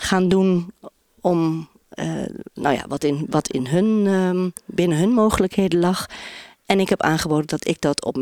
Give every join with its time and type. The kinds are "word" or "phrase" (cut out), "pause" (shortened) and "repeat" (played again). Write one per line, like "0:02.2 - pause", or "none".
none